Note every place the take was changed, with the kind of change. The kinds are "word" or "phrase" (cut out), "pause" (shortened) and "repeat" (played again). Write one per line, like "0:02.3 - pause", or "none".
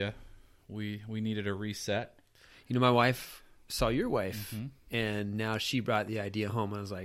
none